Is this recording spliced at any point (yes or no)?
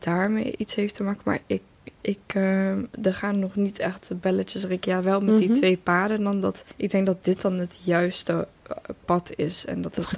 yes